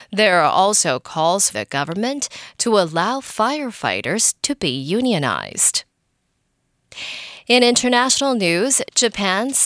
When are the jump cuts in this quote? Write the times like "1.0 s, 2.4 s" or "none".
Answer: 1.5 s